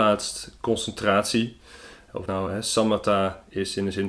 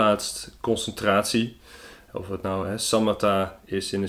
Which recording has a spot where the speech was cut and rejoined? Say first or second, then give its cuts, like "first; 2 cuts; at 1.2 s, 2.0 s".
first; 1 cut; at 2.3 s